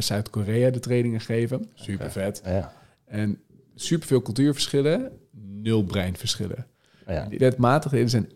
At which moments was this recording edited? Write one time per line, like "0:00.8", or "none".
0:07.4